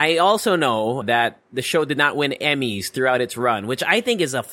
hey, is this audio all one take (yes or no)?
no